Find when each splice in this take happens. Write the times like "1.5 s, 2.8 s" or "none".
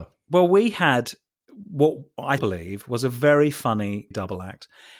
2.4 s, 4.1 s